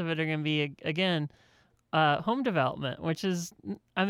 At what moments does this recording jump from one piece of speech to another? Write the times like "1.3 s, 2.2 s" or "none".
none